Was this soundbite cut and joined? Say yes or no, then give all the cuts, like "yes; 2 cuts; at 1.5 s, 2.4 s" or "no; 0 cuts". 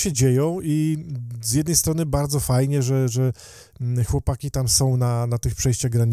no; 0 cuts